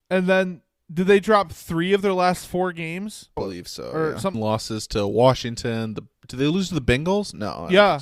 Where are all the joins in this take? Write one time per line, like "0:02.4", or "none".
0:03.4
0:04.3
0:06.1